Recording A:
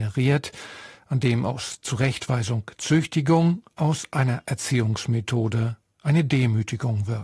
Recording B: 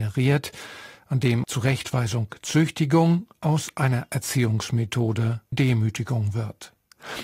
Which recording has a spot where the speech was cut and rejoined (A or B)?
B